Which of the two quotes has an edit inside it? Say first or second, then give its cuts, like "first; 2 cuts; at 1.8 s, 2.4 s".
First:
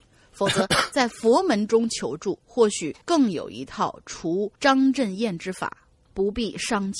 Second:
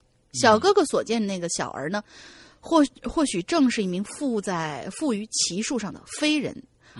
first; 3 cuts; at 3.0 s, 4.6 s, 6.1 s